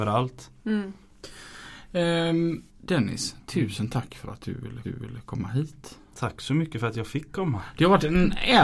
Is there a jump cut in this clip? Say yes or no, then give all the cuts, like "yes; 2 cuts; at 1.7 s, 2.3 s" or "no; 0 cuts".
yes; 2 cuts; at 2.7 s, 4.8 s